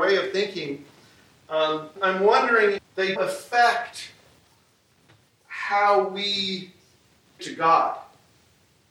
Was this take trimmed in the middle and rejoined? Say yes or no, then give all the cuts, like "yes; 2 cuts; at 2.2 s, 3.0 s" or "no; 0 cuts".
yes; 4 cuts; at 2.0 s, 2.8 s, 3.2 s, 7.4 s